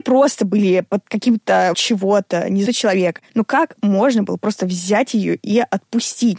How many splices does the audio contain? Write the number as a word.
three